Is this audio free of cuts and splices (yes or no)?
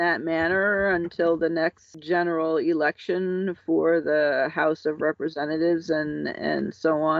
yes